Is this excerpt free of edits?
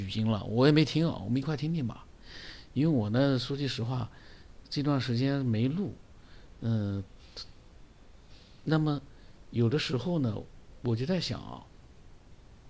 yes; 0 cuts

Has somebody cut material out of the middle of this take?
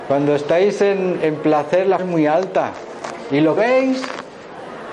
yes; 2 cuts; at 2.0 s, 3.6 s

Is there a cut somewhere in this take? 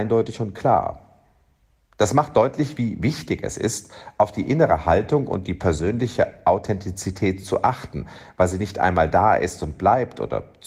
no; 0 cuts

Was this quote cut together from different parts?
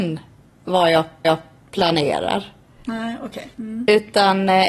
yes; 2 cuts; at 1.2 s, 3.5 s

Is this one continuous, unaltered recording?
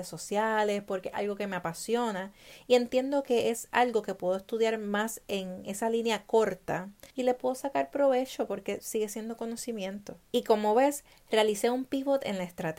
no; 2 cuts; at 7.1 s, 10.2 s

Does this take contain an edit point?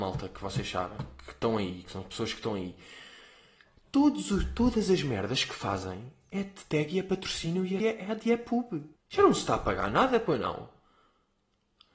yes; 2 cuts; at 7.8 s, 9.0 s

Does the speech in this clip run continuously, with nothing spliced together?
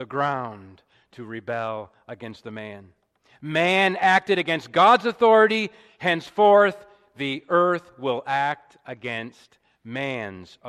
yes; 0 cuts

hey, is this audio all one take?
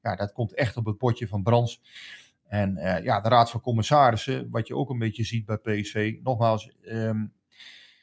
yes; 0 cuts

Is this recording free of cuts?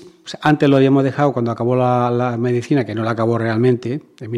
yes; 0 cuts

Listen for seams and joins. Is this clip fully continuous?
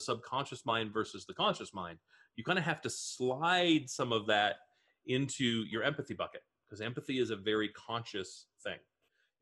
yes; 0 cuts

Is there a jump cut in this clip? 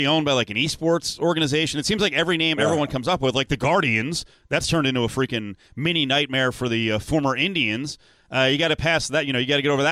no; 0 cuts

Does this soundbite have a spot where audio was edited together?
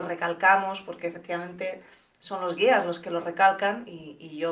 no; 0 cuts

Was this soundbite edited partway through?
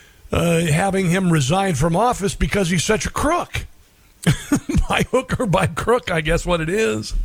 no; 0 cuts

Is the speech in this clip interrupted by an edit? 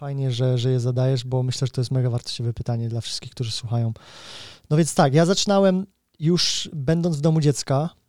no; 0 cuts

